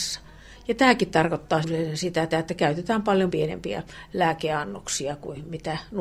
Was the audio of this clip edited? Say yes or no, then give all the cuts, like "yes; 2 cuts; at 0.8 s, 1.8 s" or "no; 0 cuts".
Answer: yes; 3 cuts; at 1.6 s, 2.3 s, 3.3 s